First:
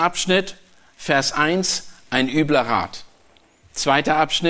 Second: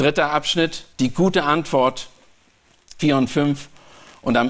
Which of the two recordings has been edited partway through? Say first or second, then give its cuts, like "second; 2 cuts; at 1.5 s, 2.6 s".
second; 2 cuts; at 0.9 s, 3.0 s